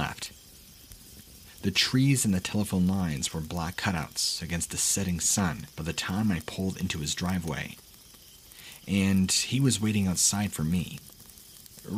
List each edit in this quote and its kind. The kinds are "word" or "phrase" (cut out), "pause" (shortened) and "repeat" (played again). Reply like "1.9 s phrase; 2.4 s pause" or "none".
5.7 s pause